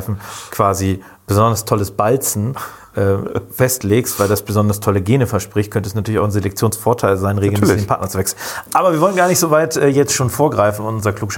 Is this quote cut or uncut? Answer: uncut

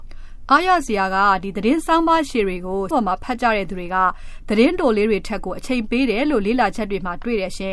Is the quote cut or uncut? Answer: cut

